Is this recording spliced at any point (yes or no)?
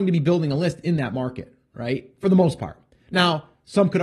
no